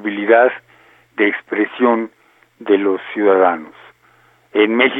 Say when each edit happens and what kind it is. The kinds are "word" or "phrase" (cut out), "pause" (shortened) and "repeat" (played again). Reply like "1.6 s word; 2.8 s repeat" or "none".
none